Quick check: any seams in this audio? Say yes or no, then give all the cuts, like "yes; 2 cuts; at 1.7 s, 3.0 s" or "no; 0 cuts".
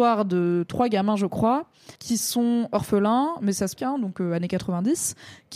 yes; 2 cuts; at 1.9 s, 3.8 s